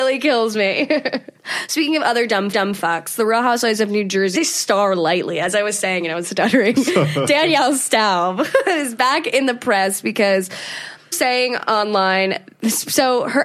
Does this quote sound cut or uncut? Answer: cut